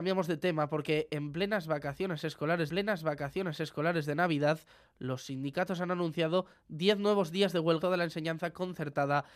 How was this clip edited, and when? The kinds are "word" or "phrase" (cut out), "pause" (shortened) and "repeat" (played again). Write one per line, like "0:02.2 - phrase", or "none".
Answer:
0:02.7 - repeat
0:07.8 - word